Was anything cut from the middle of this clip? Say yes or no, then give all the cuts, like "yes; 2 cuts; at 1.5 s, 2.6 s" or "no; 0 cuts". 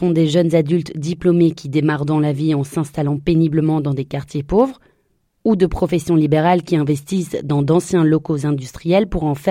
no; 0 cuts